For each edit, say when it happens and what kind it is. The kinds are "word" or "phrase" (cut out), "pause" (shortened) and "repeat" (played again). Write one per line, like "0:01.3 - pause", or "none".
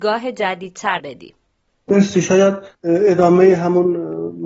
0:01.0 - word
0:02.7 - pause